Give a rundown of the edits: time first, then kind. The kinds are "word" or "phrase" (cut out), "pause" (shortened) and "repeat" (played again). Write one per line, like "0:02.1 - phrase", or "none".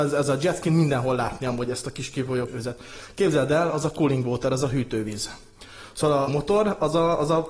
0:02.5 - word
0:06.3 - phrase